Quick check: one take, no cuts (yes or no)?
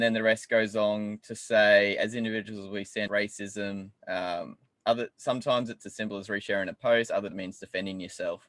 no